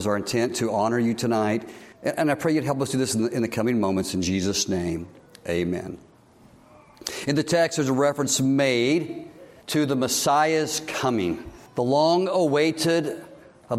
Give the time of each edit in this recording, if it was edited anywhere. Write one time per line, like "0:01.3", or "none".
0:01.9
0:09.6
0:11.7